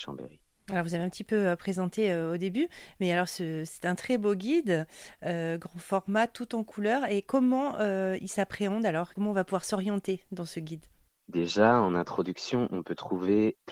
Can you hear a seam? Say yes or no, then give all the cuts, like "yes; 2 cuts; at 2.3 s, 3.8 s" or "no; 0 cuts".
no; 0 cuts